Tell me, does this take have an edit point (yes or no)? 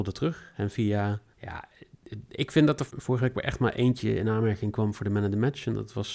yes